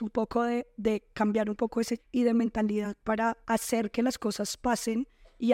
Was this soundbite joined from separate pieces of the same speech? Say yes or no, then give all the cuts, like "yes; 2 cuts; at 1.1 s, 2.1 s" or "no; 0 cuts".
yes; 2 cuts; at 2.0 s, 3.4 s